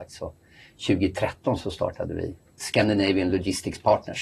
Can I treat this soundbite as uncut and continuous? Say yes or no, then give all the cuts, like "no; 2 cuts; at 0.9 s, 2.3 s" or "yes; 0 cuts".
yes; 0 cuts